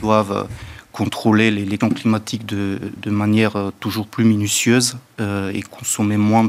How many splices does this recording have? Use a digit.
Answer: 2